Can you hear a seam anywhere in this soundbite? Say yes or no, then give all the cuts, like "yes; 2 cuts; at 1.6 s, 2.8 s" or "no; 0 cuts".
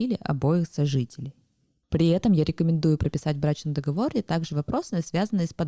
no; 0 cuts